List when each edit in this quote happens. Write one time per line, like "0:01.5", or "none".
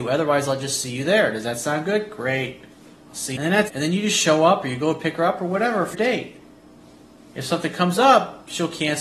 0:02.8
0:03.4
0:03.7
0:05.9